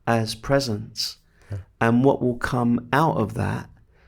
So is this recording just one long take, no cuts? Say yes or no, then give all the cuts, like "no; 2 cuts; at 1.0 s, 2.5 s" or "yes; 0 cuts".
yes; 0 cuts